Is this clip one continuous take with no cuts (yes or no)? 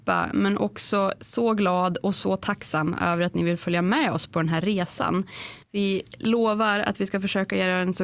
no